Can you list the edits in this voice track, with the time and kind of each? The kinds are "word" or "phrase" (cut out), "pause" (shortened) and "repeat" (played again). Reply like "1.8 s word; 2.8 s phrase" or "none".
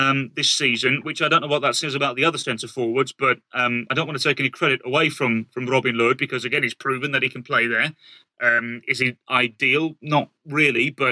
none